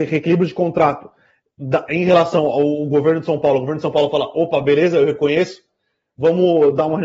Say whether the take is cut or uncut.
uncut